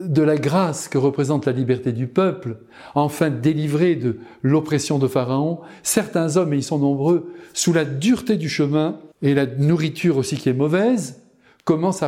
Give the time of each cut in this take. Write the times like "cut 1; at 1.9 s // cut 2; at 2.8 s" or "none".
cut 1; at 9.1 s